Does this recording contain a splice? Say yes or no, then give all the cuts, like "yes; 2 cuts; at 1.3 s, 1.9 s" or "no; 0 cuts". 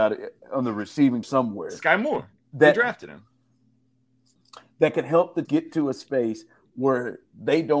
yes; 2 cuts; at 1.2 s, 5.4 s